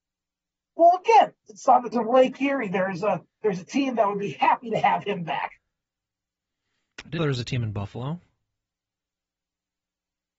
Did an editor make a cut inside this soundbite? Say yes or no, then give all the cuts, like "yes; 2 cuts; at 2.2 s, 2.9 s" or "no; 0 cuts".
yes; 2 cuts; at 1.9 s, 7.2 s